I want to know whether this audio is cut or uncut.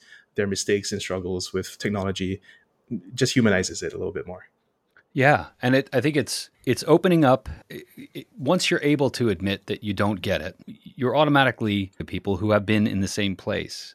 cut